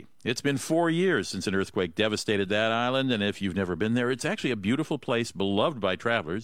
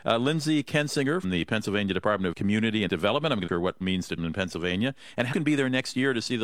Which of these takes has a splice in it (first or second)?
second